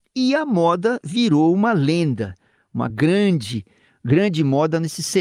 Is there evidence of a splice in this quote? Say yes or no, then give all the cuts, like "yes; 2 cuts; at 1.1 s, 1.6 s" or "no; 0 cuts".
no; 0 cuts